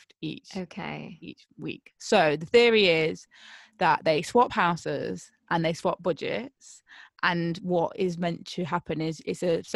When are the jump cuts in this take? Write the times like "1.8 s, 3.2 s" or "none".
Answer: none